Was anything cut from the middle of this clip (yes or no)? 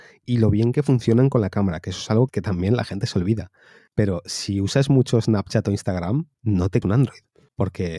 yes